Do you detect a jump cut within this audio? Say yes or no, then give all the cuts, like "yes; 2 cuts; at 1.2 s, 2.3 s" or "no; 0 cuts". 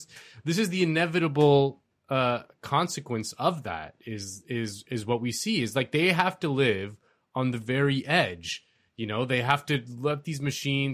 no; 0 cuts